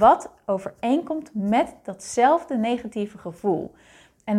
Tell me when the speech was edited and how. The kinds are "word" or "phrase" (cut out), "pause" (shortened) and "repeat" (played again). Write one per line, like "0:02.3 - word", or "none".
none